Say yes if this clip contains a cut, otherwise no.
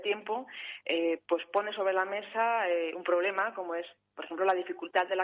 no